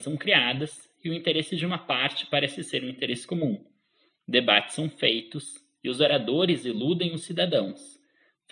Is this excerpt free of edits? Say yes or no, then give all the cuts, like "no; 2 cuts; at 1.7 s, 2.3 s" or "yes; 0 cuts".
yes; 0 cuts